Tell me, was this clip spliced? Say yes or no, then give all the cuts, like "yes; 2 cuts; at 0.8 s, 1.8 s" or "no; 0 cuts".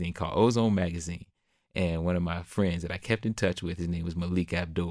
no; 0 cuts